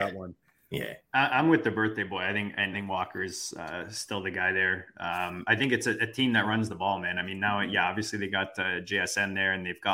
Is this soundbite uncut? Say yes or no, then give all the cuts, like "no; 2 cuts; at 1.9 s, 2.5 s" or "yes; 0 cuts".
no; 1 cut; at 2.7 s